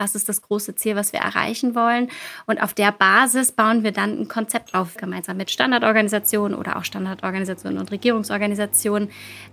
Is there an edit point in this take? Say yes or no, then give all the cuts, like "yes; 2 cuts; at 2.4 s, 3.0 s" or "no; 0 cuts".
yes; 1 cut; at 5.0 s